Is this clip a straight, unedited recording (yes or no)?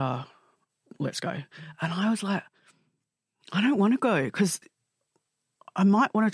yes